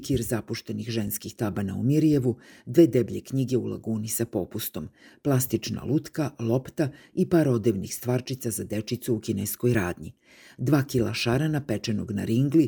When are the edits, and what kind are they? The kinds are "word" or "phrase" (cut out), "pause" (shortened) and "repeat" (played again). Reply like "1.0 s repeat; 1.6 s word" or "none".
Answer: none